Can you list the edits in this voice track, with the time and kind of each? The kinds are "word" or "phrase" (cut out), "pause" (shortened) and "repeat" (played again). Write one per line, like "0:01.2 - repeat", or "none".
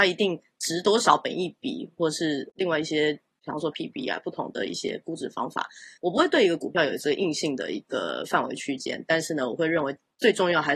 0:03.7 - phrase
0:06.0 - pause